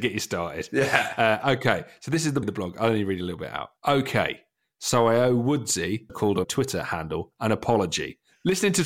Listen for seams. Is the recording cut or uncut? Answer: cut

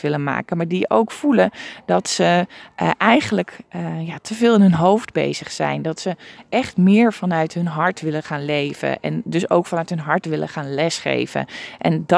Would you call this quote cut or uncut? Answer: uncut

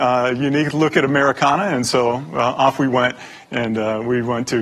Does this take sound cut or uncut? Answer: uncut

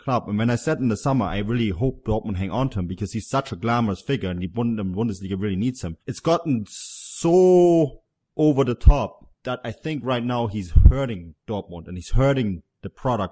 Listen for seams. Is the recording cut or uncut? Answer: cut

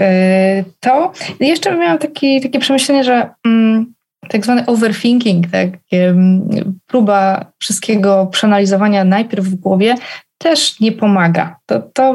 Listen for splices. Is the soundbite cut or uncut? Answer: uncut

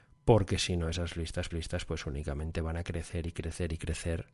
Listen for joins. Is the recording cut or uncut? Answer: cut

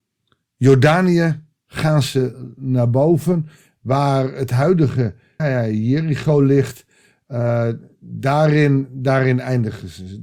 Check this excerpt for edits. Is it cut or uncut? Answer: cut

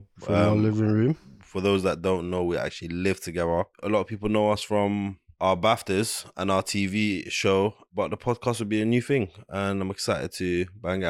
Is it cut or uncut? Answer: cut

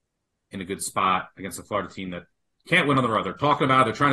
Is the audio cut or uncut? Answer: uncut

